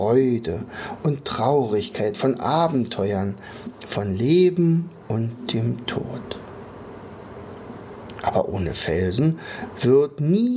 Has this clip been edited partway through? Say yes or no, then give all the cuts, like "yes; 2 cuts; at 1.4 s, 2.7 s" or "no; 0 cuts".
no; 0 cuts